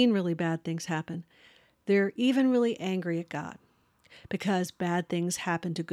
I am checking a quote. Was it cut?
no; 0 cuts

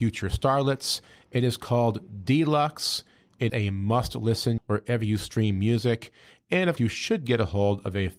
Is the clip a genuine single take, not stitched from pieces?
no; 3 cuts; at 3.5 s, 4.6 s, 6.8 s

